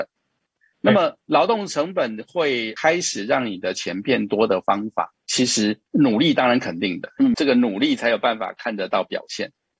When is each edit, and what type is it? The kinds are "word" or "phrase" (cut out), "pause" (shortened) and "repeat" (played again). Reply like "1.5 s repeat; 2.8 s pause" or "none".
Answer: 1.2 s pause; 5.2 s pause